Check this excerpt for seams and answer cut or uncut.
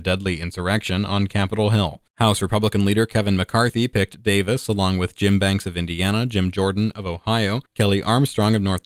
cut